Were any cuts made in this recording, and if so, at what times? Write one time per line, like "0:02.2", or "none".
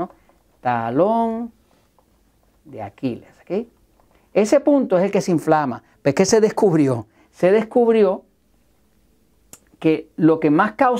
none